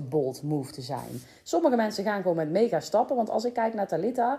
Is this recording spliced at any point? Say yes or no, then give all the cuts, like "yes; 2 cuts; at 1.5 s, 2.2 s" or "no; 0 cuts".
no; 0 cuts